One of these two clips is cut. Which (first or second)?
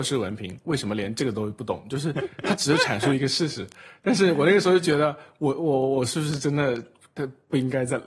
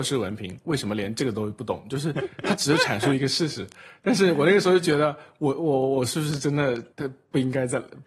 second